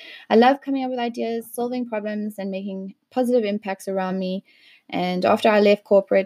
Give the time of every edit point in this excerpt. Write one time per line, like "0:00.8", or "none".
none